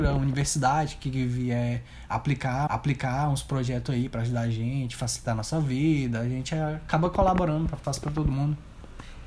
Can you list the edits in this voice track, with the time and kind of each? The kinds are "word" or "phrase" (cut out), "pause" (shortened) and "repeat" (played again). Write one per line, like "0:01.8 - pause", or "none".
0:02.7 - repeat
0:07.8 - word